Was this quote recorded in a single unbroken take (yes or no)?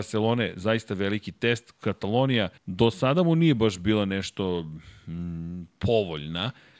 no